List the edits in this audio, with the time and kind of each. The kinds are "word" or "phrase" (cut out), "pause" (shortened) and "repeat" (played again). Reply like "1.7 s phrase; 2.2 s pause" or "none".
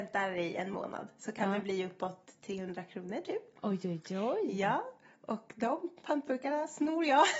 none